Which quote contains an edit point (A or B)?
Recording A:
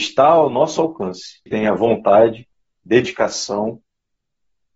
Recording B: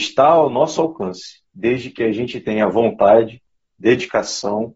A